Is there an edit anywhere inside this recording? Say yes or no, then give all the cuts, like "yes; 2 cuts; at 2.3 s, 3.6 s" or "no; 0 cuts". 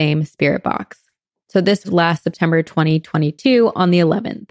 yes; 1 cut; at 1.8 s